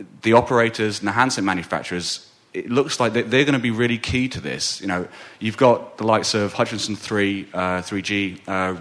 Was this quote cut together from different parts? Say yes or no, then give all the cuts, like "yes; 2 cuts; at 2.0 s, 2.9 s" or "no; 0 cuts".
no; 0 cuts